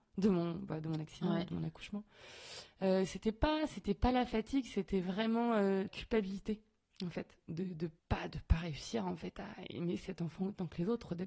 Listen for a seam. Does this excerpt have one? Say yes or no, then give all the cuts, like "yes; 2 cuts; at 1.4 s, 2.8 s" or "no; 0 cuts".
yes; 2 cuts; at 5.9 s, 8.0 s